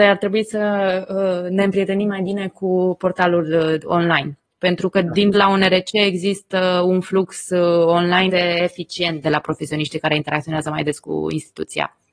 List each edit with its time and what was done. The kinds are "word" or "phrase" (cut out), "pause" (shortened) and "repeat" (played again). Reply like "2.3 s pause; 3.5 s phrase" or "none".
5.3 s word; 8.3 s word; 9.2 s phrase

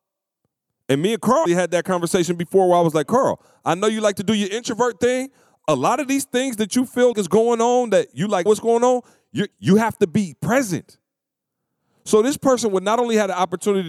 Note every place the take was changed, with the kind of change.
1.5 s word; 7.1 s word; 8.5 s word; 9.5 s pause

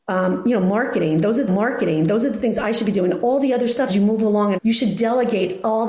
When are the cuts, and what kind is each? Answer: 1.5 s repeat; 3.9 s word; 4.5 s phrase

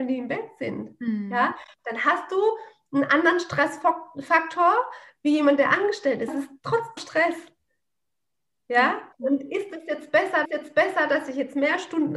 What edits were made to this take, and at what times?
6.3 s word; 7.0 s word; 9.1 s pause; 10.4 s repeat

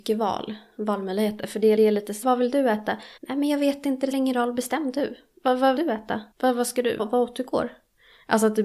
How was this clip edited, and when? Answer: 1.8 s repeat; 2.2 s word; 3.2 s pause; 4.1 s word; 5.8 s word; 6.3 s pause; 7.0 s word

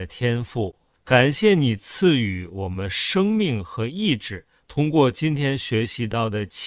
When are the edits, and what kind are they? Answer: 1.0 s pause

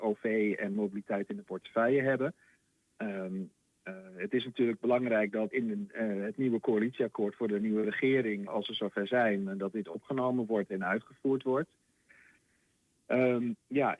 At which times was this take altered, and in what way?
5.5 s word; 8.5 s word

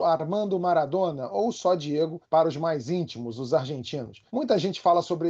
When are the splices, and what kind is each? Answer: 2.2 s pause; 4.3 s pause

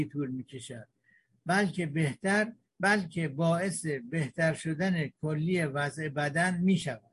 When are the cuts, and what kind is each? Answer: none

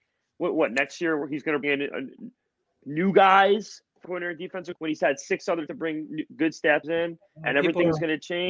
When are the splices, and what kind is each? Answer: 1.6 s word; 4.0 s word; 4.7 s word; 5.7 s word; 6.8 s word

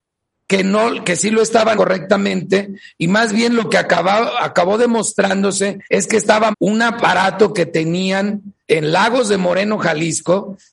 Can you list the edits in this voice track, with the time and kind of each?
1.8 s word; 5.9 s pause; 6.5 s phrase; 8.6 s pause

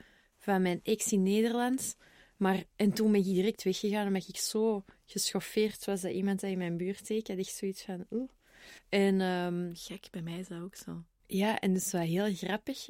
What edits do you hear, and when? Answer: 8.8 s pause

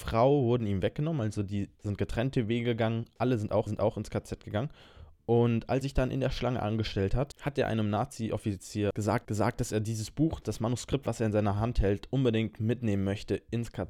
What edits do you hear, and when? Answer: 1.7 s pause; 3.7 s repeat; 5.8 s word; 9.2 s repeat

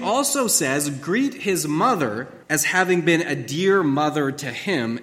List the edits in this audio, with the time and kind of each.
2.4 s pause

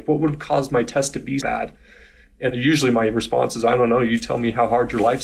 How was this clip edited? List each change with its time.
1.4 s word; 2.5 s word

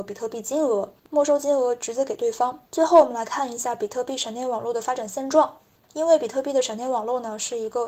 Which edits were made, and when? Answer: 1.0 s pause; 2.7 s pause; 5.8 s pause

